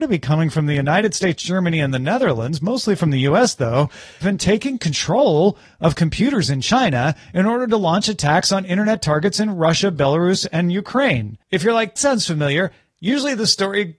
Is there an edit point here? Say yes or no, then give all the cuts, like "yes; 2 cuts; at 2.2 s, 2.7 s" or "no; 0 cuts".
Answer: yes; 3 cuts; at 4.2 s, 11.4 s, 12.0 s